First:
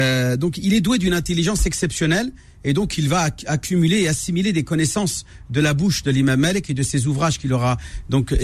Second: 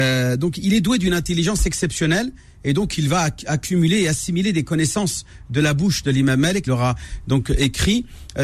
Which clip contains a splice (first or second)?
second